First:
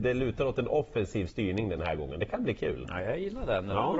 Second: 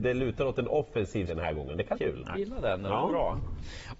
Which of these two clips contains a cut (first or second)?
second